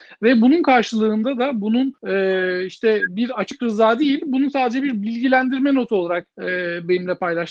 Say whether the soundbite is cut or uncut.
cut